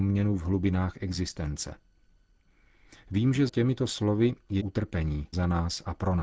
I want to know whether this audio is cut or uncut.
cut